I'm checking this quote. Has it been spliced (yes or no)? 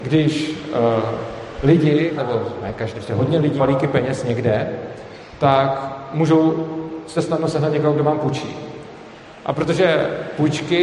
yes